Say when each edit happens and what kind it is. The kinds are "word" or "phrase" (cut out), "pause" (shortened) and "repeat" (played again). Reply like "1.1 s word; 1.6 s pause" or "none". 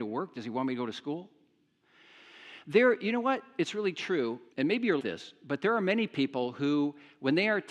4.5 s pause; 5.0 s word